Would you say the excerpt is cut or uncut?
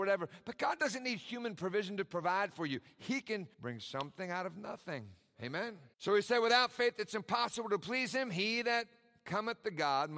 cut